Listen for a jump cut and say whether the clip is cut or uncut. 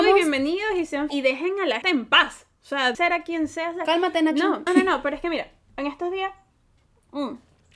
cut